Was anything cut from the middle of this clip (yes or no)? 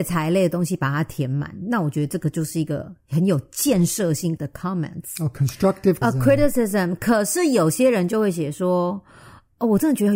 yes